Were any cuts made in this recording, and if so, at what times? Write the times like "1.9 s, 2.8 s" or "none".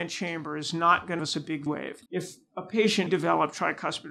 1.2 s, 1.7 s, 2.1 s, 3.1 s